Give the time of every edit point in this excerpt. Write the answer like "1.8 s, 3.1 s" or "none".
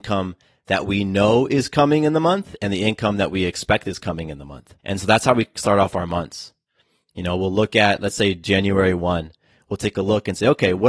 4.8 s